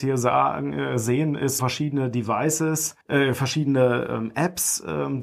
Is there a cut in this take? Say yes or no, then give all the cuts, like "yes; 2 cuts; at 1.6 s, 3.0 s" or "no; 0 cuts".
yes; 2 cuts; at 1.6 s, 3.0 s